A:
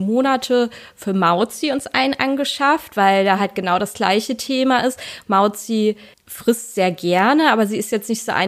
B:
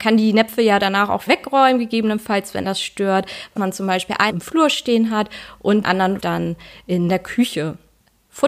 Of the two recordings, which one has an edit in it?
B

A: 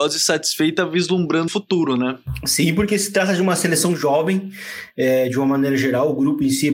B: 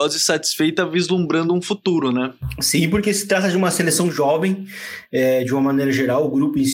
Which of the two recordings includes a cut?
A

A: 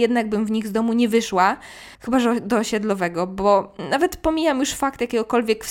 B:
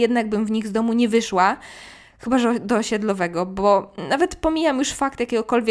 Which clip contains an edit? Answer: A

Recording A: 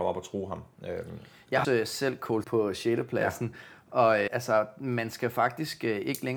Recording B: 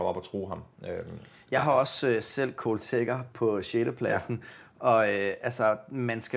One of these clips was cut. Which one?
A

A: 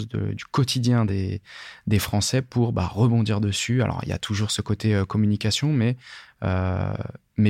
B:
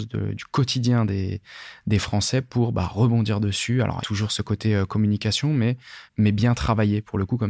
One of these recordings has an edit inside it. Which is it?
B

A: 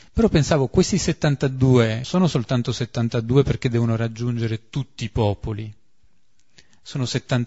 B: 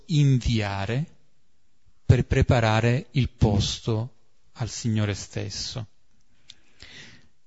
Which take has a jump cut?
A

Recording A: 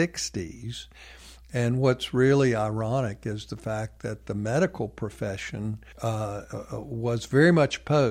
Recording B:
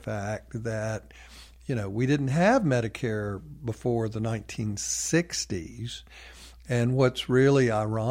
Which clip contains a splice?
A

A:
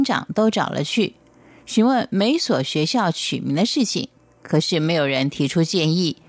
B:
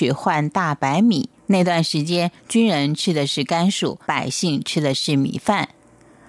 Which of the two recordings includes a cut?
B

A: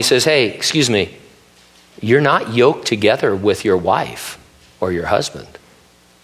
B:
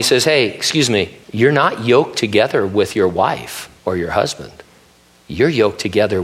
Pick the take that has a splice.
B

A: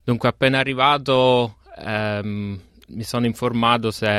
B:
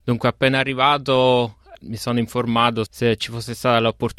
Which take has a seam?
B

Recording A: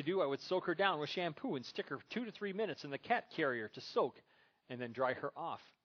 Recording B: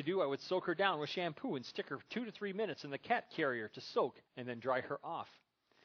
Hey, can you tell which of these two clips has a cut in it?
B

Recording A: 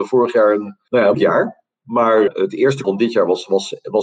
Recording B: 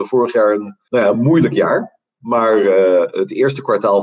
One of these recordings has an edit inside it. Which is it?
A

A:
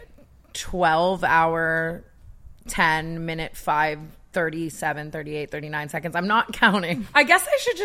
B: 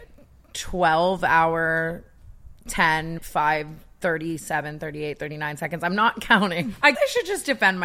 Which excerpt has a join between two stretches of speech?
B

